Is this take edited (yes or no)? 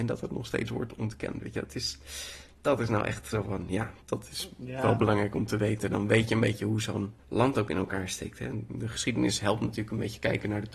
yes